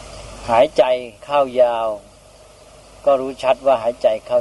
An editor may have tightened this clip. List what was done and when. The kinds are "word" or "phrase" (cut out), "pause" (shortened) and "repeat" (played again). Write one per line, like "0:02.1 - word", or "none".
0:01.2 - pause

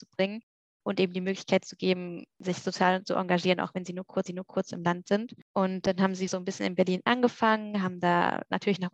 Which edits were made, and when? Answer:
0:04.3 - repeat
0:05.4 - pause
0:06.3 - word

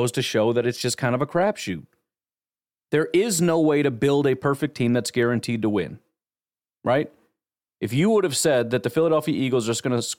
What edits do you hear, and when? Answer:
none

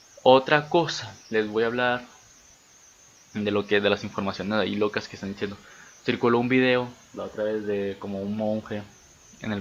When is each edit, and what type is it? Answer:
0:01.2 - pause

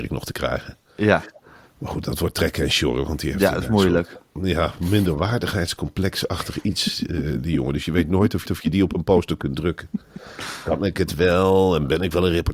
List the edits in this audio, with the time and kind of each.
0:08.5 - repeat

